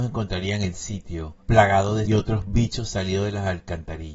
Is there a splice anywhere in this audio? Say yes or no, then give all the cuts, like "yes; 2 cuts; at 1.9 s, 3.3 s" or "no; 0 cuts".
yes; 2 cuts; at 1.4 s, 2.1 s